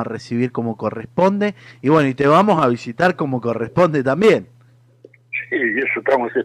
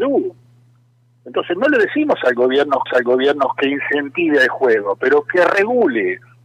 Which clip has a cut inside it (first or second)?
second